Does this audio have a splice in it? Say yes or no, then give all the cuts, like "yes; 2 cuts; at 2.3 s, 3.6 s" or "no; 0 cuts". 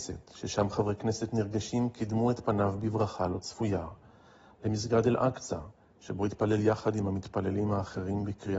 no; 0 cuts